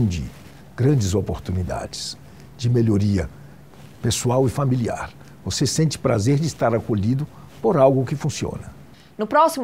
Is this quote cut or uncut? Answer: uncut